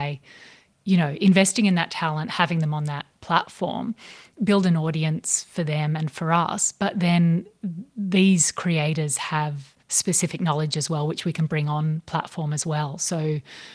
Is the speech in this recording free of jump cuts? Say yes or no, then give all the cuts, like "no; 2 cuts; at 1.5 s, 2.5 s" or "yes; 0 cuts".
no; 1 cut; at 9.8 s